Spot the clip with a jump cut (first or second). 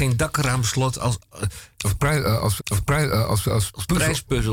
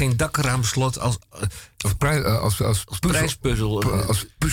first